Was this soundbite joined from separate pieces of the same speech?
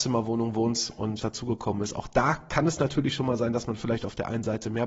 yes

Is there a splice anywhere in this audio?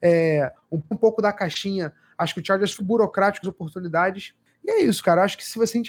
yes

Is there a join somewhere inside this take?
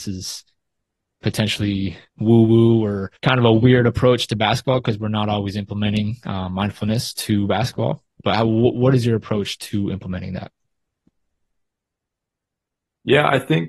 yes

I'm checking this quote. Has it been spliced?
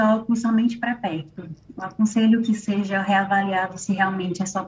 no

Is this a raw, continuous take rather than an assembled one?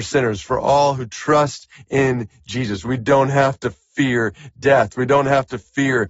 yes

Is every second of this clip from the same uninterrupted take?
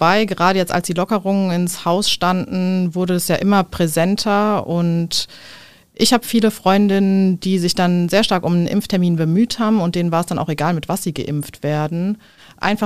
yes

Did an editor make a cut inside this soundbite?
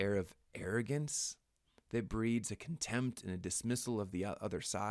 no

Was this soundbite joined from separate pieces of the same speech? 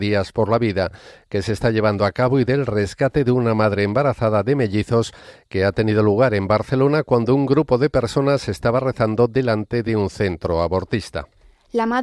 no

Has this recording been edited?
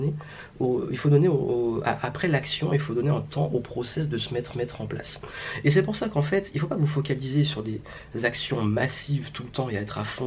yes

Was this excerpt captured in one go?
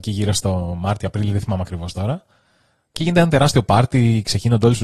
yes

